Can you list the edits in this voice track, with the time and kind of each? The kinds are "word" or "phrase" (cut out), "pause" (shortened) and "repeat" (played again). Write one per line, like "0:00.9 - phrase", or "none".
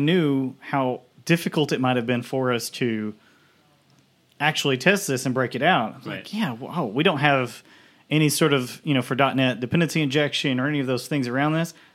none